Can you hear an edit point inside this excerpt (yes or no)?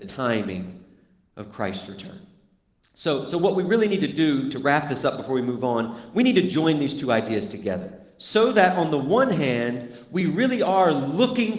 no